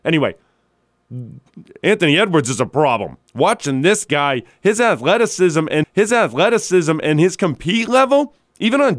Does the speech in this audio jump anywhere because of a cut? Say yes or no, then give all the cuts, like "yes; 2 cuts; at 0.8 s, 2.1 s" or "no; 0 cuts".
yes; 2 cuts; at 3.2 s, 5.8 s